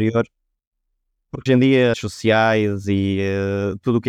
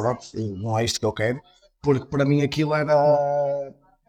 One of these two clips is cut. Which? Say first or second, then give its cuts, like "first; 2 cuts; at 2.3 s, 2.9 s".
first; 2 cuts; at 1.5 s, 1.9 s